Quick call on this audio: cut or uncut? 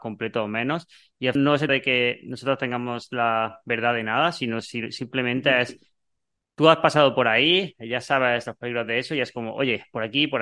cut